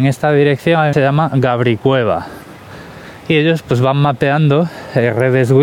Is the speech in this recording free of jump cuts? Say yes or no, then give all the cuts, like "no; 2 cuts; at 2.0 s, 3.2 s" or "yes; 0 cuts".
no; 1 cut; at 0.9 s